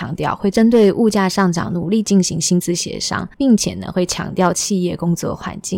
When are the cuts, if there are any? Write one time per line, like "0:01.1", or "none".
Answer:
0:03.3